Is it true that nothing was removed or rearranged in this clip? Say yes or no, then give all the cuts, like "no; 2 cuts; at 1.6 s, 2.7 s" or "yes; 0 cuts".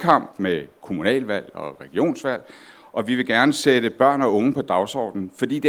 yes; 0 cuts